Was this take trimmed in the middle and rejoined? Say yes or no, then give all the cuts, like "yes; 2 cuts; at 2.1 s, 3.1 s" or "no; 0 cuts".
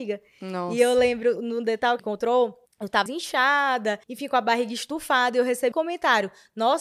yes; 6 cuts; at 1.4 s, 2.0 s, 2.7 s, 3.1 s, 4.0 s, 5.7 s